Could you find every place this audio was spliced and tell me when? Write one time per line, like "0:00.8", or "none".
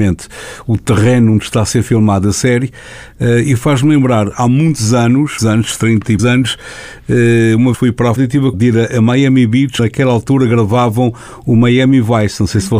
0:05.4
0:06.2
0:07.7
0:08.2
0:08.5
0:09.8